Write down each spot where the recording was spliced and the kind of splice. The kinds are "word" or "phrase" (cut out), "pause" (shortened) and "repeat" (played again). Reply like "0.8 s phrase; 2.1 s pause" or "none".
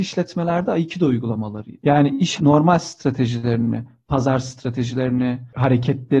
2.4 s phrase